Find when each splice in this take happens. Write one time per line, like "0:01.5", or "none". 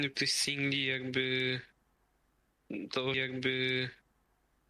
0:03.1